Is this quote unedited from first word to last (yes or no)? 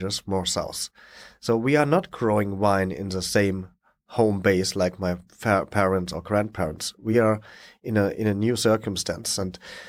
yes